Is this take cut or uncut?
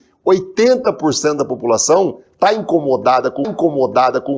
cut